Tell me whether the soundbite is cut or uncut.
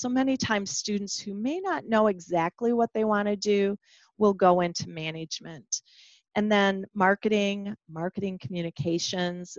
uncut